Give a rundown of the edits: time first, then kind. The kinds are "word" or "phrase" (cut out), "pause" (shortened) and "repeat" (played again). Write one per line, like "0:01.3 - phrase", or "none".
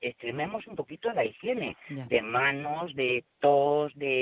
none